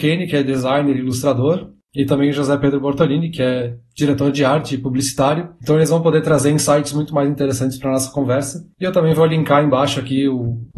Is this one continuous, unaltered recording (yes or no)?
yes